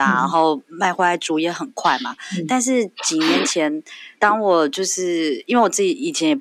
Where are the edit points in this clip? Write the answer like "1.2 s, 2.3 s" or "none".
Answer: 4.1 s